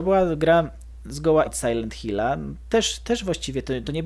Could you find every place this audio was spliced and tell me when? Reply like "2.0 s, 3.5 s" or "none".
1.5 s